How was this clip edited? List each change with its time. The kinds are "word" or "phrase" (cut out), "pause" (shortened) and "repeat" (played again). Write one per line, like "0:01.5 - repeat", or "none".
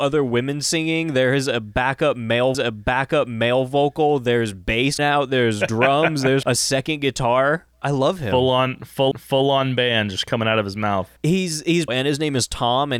0:02.5 - repeat
0:05.0 - word
0:06.4 - word
0:07.7 - pause
0:09.1 - repeat
0:11.2 - pause
0:11.9 - word